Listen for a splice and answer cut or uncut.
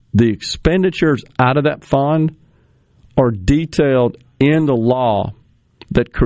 uncut